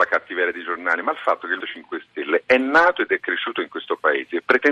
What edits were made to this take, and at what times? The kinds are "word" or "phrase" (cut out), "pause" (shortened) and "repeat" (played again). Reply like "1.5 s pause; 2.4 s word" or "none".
1.6 s word